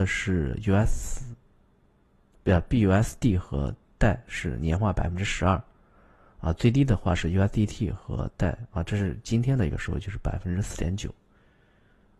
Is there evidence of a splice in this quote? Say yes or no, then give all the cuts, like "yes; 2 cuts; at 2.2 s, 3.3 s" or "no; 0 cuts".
no; 0 cuts